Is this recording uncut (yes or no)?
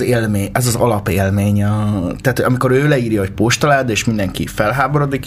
yes